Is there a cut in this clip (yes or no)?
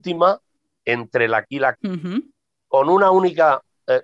yes